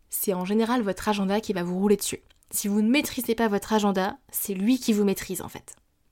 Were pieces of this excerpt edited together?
no; 0 cuts

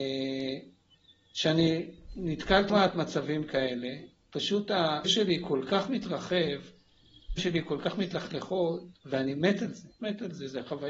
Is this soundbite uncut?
no; 6 cuts; at 0.9 s, 2.7 s, 4.2 s, 5.0 s, 7.4 s, 10.0 s

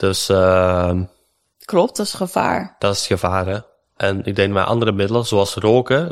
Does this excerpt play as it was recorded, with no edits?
yes; 0 cuts

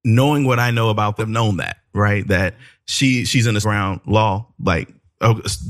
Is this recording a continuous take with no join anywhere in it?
no; 2 cuts; at 1.2 s, 3.6 s

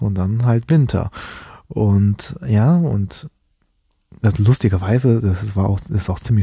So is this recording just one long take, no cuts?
yes; 0 cuts

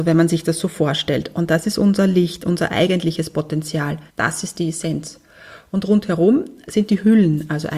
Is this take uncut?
no; 1 cut; at 4.1 s

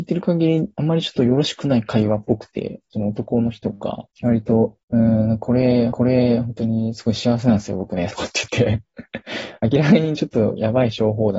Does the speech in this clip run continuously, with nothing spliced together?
no; 4 cuts; at 4.1 s, 4.8 s, 5.9 s, 8.1 s

